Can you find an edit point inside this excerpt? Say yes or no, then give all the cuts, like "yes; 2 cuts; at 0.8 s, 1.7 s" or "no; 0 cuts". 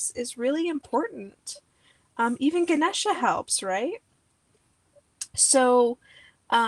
no; 0 cuts